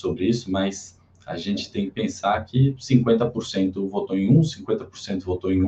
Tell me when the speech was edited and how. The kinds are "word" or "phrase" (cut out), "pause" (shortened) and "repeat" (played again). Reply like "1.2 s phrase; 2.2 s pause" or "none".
none